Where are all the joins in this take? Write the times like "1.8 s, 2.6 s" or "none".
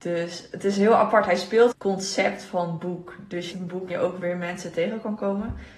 1.7 s, 3.5 s, 3.9 s